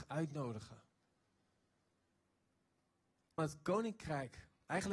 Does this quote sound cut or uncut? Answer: cut